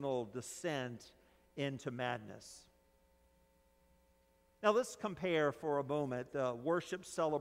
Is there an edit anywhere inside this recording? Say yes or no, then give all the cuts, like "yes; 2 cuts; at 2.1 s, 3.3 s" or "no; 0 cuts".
no; 0 cuts